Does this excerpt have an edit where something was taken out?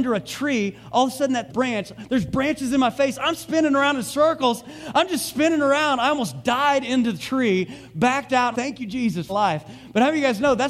yes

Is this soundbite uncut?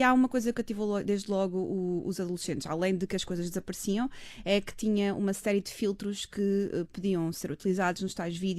yes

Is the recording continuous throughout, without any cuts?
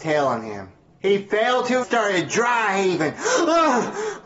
no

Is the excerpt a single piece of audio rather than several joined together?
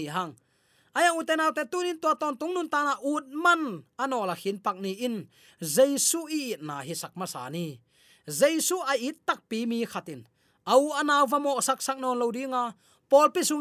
yes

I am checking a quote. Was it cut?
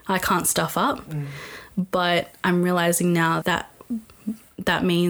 yes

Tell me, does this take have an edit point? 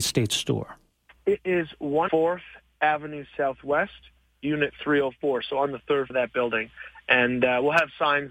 yes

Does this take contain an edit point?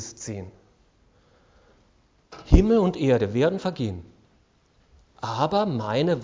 no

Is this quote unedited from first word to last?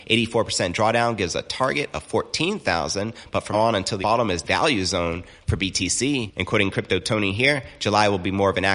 no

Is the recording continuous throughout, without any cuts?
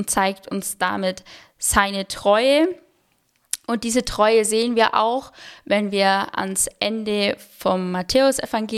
yes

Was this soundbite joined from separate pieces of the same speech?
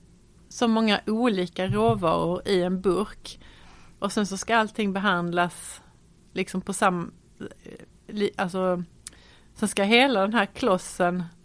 no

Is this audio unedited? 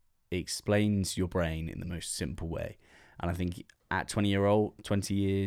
yes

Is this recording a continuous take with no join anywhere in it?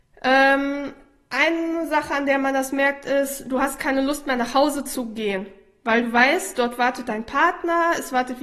yes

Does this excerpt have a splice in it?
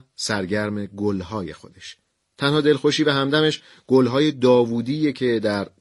no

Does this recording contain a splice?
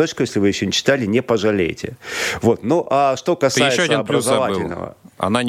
no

